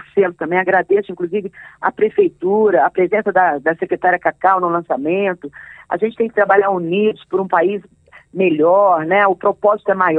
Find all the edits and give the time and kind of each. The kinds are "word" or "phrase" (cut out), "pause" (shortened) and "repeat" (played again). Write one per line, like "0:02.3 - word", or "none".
none